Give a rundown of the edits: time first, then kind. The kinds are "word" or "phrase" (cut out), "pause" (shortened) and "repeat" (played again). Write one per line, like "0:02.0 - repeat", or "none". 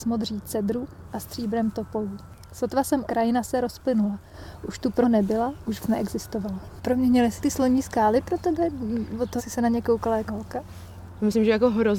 0:03.0 - word
0:05.0 - word
0:05.8 - word
0:07.4 - word
0:09.4 - word
0:10.3 - word